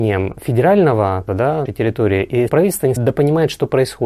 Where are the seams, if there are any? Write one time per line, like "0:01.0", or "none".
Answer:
0:01.3
0:01.7
0:02.5
0:03.0